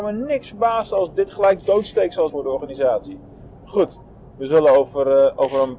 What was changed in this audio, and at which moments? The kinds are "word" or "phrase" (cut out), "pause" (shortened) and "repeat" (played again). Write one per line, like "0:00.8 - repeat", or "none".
0:01.6 - word
0:02.3 - word